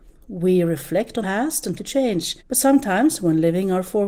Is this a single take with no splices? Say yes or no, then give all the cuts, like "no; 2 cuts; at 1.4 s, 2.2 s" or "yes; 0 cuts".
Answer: no; 3 cuts; at 1.2 s, 1.8 s, 2.4 s